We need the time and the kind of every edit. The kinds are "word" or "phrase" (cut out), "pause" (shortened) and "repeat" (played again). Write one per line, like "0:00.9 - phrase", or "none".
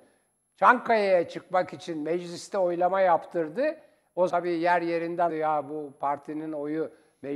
0:04.3 - word
0:05.3 - word

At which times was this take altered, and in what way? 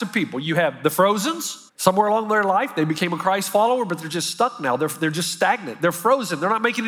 0:01.7 - pause

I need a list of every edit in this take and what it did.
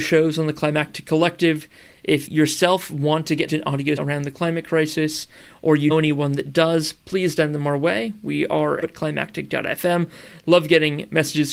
0:02.3 - word
0:03.5 - word
0:04.0 - word
0:05.9 - word
0:07.4 - word
0:08.8 - word

